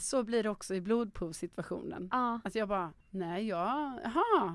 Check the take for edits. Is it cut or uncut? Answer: cut